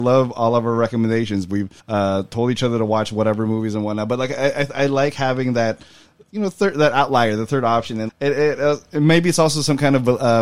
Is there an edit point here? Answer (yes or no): yes